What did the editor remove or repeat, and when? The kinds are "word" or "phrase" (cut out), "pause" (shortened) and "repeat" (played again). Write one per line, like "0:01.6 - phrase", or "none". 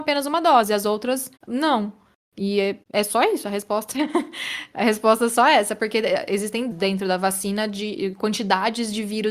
0:01.4 - pause
0:02.8 - pause
0:06.7 - word